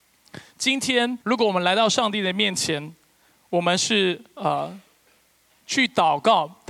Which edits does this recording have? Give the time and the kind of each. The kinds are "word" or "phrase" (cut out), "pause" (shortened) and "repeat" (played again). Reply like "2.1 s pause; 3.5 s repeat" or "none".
1.2 s pause

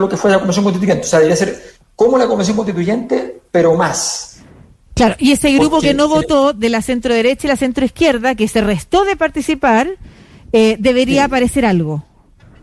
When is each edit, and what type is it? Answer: none

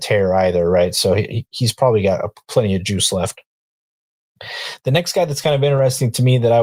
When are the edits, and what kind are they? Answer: none

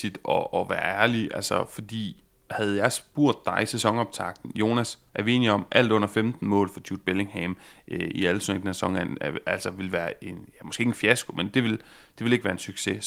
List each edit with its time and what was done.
none

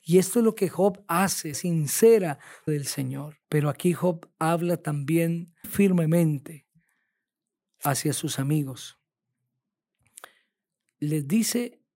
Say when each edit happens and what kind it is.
1.5 s word; 2.7 s word; 3.4 s pause; 5.6 s word

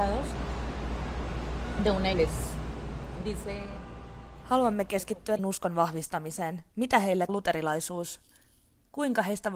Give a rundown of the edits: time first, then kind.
2.1 s phrase; 5.4 s phrase; 6.7 s pause; 7.3 s word

